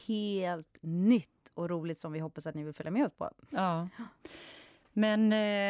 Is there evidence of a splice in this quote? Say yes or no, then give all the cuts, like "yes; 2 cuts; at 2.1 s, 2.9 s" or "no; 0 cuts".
no; 0 cuts